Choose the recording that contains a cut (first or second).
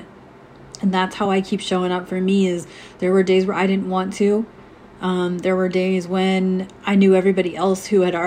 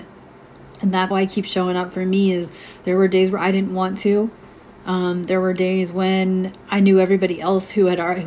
second